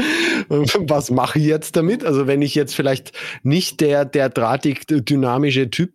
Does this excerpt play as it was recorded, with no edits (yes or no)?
yes